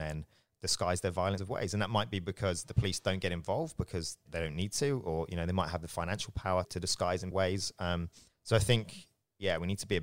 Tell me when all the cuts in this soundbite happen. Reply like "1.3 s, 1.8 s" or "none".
1.4 s, 4.3 s, 6.6 s, 7.3 s, 8.3 s